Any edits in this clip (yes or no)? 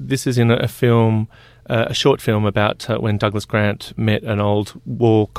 no